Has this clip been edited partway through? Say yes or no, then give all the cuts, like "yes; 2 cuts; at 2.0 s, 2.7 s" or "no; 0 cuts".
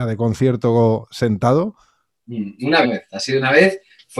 yes; 1 cut; at 2.8 s